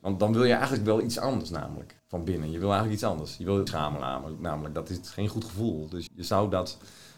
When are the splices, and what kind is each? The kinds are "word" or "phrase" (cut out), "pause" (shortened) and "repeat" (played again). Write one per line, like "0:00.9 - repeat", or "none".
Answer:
0:02.0 - pause
0:03.7 - phrase
0:06.1 - word